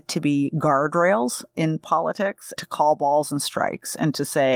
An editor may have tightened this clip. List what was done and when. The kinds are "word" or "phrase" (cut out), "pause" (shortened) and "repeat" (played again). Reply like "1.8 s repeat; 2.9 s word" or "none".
2.6 s word